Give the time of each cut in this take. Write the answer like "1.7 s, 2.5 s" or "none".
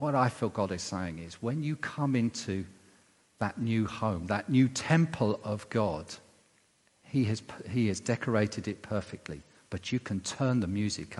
6.7 s